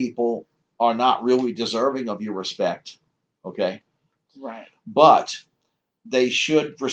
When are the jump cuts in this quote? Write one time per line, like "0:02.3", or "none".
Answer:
none